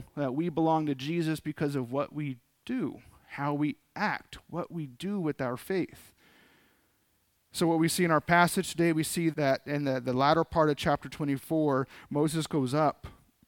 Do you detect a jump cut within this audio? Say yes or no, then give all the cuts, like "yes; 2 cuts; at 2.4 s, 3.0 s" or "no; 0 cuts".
yes; 1 cut; at 9.3 s